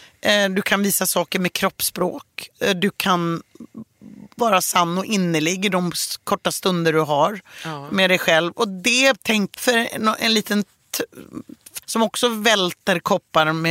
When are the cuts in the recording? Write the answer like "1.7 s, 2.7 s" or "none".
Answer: 9.5 s, 11.8 s